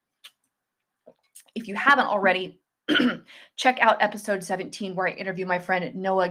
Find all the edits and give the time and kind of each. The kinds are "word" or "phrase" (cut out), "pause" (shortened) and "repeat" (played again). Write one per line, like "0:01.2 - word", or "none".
none

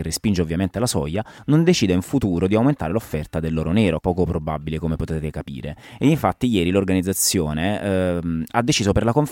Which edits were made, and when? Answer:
0:04.0 - word

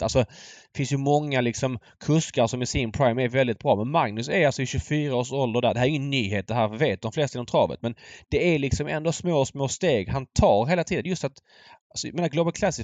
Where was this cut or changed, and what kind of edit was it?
none

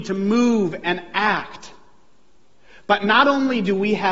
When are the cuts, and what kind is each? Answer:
none

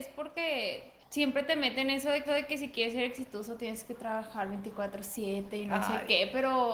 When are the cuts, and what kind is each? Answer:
0:01.0 - pause
0:02.3 - repeat

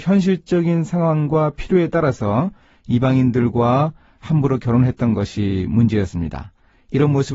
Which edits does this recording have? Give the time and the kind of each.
none

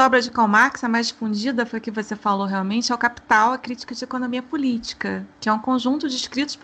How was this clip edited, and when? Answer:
none

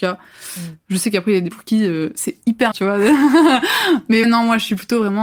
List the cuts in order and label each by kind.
0:01.5 - word
0:02.7 - word
0:04.2 - word

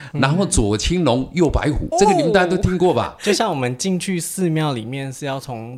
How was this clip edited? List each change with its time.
0:01.9 - word

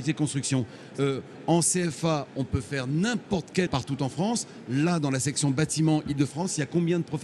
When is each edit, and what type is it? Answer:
0:03.7 - word

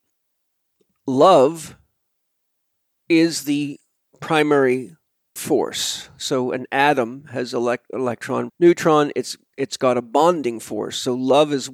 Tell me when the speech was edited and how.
0:05.4 - word
0:08.5 - word

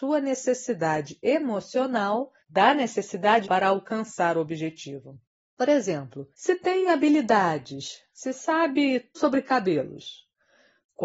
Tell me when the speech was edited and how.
0:02.4 - pause
0:03.4 - word
0:05.3 - pause
0:06.3 - pause
0:09.1 - word

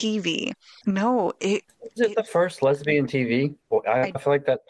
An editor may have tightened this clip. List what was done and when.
0:02.0 - word
0:03.1 - phrase
0:03.6 - pause

